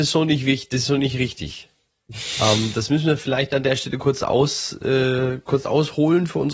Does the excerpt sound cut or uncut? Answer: uncut